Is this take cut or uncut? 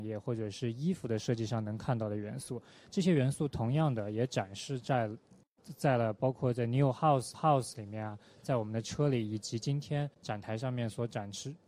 cut